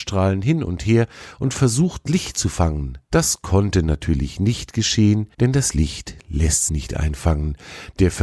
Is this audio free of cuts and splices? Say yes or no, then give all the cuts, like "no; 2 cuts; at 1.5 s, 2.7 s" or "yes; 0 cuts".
no; 4 cuts; at 2.1 s, 3.0 s, 5.3 s, 6.7 s